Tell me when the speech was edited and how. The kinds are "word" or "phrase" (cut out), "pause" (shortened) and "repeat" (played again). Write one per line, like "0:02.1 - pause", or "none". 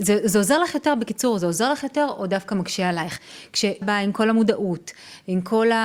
0:03.8 - word

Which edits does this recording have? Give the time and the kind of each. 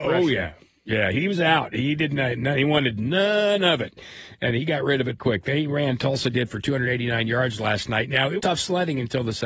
0:05.2 - word
0:08.4 - word

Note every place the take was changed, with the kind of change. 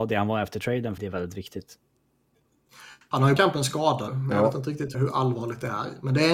0:01.0 - phrase
0:03.4 - word
0:04.1 - word
0:04.9 - word

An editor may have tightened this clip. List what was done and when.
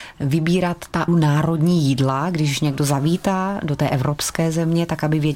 0:01.1 - word

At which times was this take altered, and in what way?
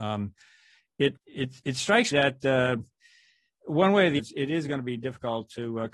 0:01.2 - word
0:02.1 - word
0:04.2 - word

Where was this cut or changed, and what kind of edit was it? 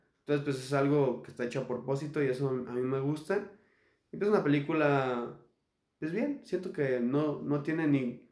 none

